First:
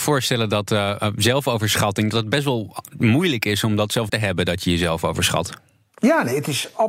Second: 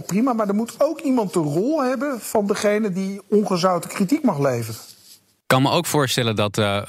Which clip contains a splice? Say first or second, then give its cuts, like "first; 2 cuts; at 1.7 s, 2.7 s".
first; 1 cut; at 4.1 s